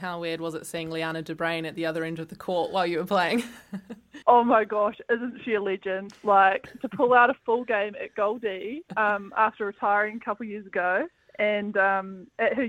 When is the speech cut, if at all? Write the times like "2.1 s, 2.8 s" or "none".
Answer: 4.2 s, 8.9 s, 11.2 s